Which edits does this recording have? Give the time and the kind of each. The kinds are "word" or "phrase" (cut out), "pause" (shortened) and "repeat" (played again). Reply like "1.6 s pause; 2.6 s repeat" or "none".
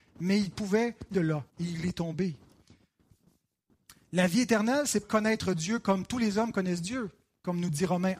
1.1 s word; 1.5 s pause; 5.0 s phrase